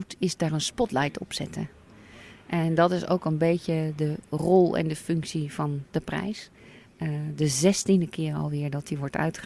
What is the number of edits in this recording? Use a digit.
0